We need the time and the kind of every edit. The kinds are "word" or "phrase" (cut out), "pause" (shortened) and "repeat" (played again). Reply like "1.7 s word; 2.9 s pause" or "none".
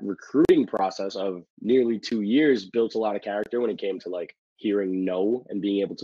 1.5 s pause; 4.5 s pause

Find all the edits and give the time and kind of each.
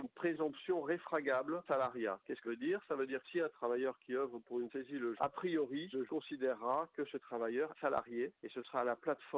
1.7 s word; 2.4 s word; 3.2 s word; 4.7 s word; 5.2 s word; 6.1 s word; 7.7 s word

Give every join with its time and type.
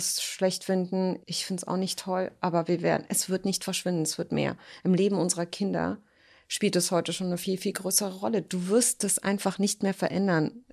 1.2 s pause

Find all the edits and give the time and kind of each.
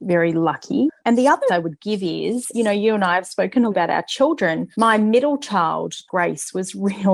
1.0 s pause; 1.5 s word; 2.5 s word; 3.7 s word; 4.7 s pause

